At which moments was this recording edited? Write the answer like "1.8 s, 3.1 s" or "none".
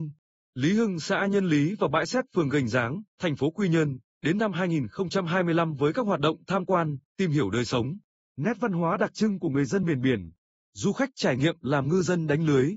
none